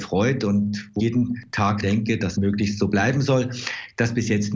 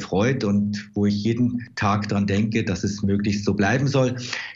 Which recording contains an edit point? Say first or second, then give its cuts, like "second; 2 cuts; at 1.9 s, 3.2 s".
first; 3 cuts; at 1.0 s, 1.8 s, 2.4 s